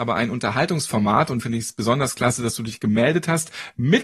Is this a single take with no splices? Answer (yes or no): no